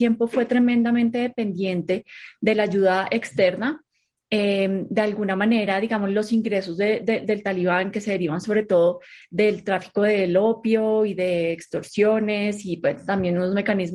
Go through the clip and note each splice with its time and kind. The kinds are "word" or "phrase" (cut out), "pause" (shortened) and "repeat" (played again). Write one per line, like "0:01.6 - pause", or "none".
none